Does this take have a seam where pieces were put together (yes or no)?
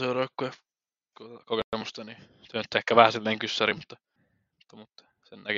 no